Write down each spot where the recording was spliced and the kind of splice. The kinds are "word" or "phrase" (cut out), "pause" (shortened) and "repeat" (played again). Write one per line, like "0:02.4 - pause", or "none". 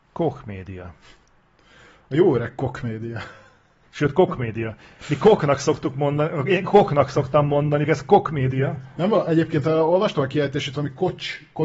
0:07.9 - word